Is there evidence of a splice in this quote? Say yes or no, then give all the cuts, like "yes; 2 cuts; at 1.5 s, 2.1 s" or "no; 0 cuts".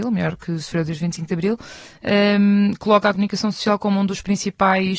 no; 0 cuts